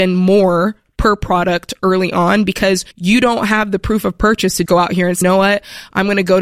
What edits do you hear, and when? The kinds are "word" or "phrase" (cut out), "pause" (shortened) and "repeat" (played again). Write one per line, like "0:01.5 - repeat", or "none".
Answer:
0:02.9 - pause
0:04.7 - word
0:05.2 - word